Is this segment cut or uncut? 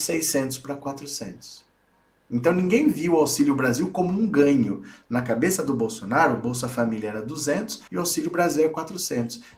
cut